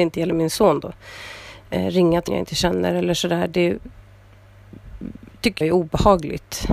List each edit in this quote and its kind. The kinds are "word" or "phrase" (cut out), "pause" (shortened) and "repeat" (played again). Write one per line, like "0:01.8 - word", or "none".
0:02.3 - word
0:05.6 - word